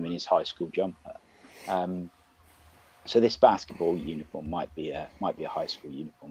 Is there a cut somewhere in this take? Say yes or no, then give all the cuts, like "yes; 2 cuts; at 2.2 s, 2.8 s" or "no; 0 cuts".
no; 0 cuts